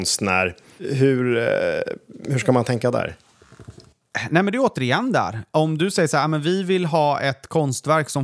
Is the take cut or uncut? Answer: uncut